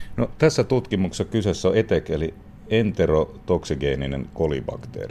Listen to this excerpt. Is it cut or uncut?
uncut